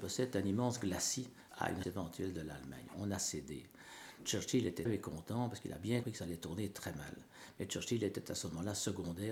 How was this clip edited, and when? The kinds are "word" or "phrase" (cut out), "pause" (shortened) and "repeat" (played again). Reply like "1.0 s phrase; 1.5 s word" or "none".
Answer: 1.5 s word; 1.8 s word; 4.9 s word; 6.0 s word